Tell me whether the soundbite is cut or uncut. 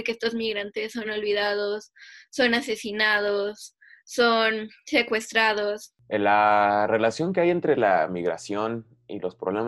uncut